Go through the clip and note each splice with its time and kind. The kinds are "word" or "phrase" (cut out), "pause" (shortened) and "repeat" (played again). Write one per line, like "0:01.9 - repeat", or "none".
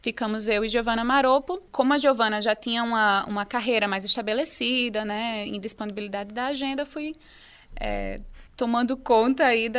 0:08.5 - pause